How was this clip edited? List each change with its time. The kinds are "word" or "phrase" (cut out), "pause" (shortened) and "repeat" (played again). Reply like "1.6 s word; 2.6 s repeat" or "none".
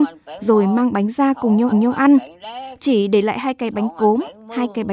1.7 s repeat